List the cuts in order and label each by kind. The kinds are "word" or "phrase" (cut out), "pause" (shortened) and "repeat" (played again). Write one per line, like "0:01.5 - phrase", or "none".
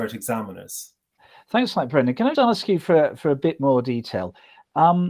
0:02.3 - word